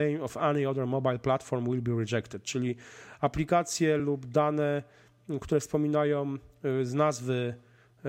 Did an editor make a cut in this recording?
no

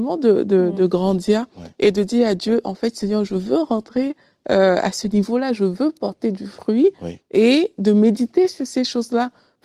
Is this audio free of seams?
yes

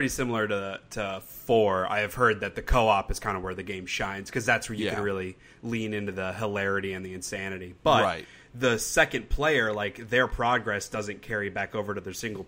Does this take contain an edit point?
no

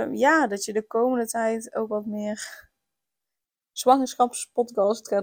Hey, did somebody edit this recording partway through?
no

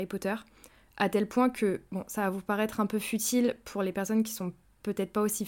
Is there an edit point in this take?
no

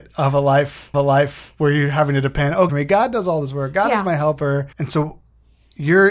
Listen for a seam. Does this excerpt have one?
yes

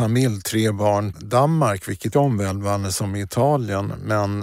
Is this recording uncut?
no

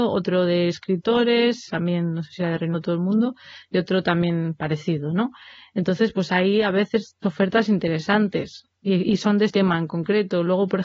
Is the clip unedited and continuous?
no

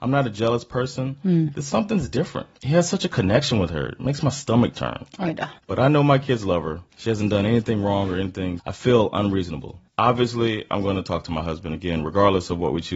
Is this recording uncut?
no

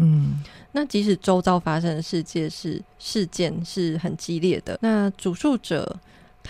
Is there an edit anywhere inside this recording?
yes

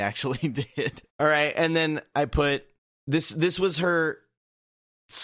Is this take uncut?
no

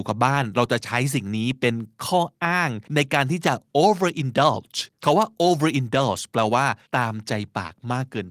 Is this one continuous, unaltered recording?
no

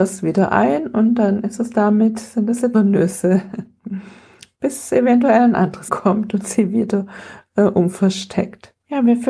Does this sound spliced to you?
yes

